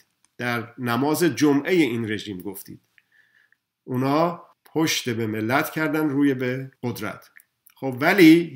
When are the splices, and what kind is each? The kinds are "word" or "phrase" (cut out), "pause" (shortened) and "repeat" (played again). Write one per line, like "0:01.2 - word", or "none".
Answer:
0:04.5 - pause
0:06.8 - pause